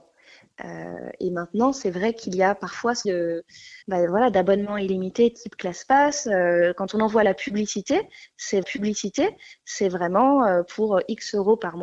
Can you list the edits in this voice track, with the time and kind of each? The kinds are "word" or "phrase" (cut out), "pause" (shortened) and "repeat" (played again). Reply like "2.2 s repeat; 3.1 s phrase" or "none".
3.0 s word; 3.8 s pause; 8.6 s repeat